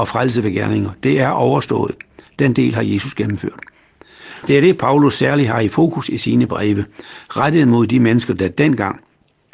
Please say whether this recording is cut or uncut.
uncut